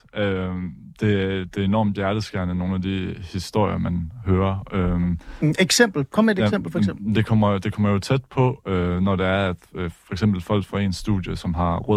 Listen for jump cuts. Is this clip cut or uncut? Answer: uncut